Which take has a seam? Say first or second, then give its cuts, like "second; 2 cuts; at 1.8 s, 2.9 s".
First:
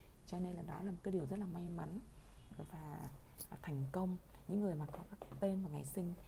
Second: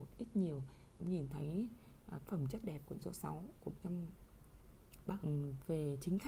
second; 6 cuts; at 1.0 s, 2.3 s, 2.6 s, 3.0 s, 3.8 s, 5.2 s